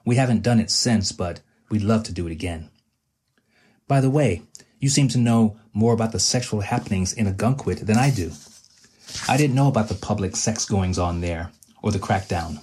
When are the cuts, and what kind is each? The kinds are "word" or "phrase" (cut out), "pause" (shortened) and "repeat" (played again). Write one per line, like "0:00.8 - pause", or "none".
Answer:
none